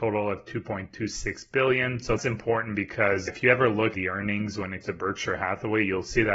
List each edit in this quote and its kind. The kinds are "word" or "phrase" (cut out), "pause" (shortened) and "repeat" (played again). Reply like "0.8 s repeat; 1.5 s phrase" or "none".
2.2 s word; 3.3 s word; 3.9 s word; 4.8 s word